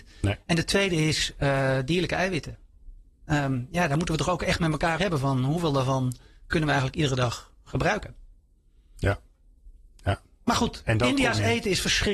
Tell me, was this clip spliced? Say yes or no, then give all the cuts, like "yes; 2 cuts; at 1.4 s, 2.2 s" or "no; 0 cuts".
yes; 1 cut; at 5.0 s